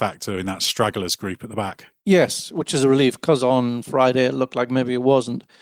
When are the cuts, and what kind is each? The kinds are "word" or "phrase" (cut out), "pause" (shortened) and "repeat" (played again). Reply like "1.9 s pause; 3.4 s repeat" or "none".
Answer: 2.0 s pause

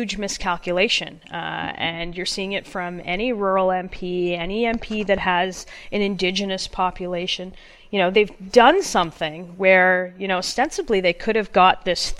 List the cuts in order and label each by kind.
8.1 s word

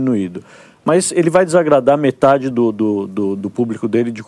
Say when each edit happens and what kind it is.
none

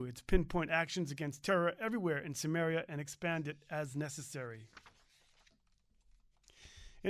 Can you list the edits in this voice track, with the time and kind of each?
none

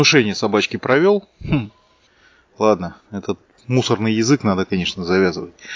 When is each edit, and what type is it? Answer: 1.3 s pause; 3.0 s pause

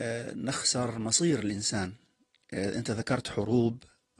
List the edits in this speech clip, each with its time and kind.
none

